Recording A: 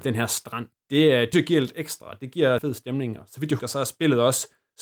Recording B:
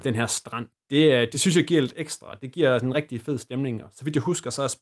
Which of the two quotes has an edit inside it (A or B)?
A